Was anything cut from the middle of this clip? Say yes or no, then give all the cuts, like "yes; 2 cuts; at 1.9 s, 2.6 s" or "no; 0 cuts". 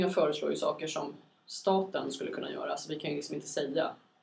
no; 0 cuts